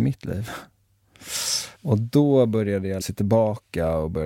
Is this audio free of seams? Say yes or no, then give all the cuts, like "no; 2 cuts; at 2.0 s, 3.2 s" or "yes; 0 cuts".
no; 2 cuts; at 1.7 s, 3.0 s